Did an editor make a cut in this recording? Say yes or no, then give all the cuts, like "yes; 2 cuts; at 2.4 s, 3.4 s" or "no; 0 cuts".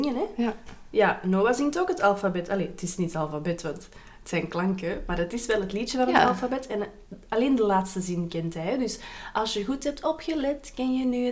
no; 0 cuts